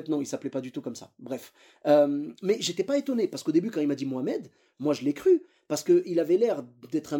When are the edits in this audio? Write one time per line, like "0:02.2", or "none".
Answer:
none